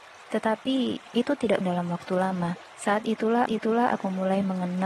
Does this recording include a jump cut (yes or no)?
yes